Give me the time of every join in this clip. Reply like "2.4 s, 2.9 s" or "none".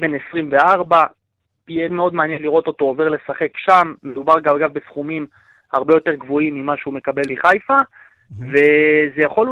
1.9 s, 7.3 s